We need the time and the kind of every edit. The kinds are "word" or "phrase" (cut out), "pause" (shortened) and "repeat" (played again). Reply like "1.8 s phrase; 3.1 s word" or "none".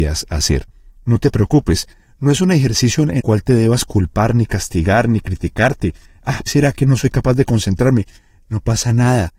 3.2 s word; 6.5 s phrase